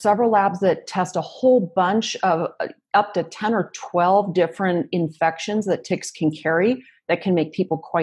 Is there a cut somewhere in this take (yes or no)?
no